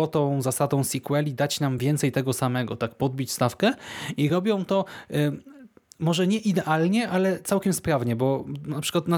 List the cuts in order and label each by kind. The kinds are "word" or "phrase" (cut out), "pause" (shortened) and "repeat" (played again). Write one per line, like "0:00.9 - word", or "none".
none